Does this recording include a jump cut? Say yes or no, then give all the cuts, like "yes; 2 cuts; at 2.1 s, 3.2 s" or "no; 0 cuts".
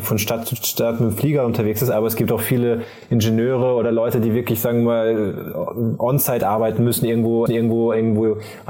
yes; 1 cut; at 7.5 s